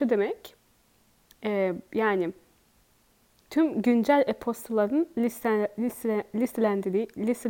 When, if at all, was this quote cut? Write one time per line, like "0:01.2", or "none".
none